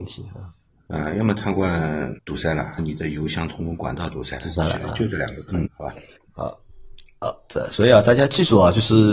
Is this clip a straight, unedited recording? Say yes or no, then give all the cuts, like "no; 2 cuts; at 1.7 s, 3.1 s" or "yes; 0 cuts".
no; 4 cuts; at 2.2 s, 2.8 s, 5.7 s, 6.2 s